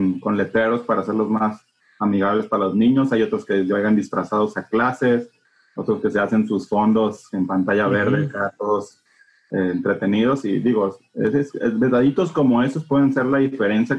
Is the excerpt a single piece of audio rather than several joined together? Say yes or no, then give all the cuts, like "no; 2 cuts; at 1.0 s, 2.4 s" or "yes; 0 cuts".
yes; 0 cuts